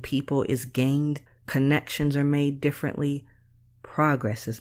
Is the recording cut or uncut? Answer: cut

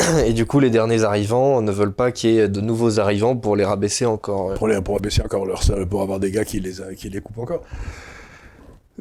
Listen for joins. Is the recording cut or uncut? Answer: cut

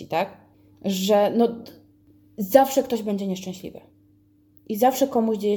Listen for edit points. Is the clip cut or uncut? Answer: uncut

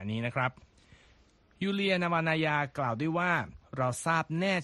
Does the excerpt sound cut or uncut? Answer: uncut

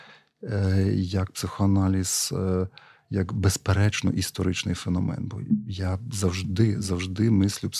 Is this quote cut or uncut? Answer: uncut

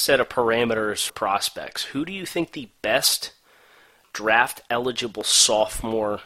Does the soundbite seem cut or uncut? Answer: cut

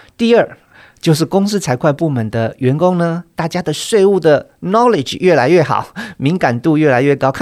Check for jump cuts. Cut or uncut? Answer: uncut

